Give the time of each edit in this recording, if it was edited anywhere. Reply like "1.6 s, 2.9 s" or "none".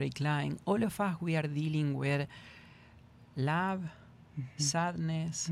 none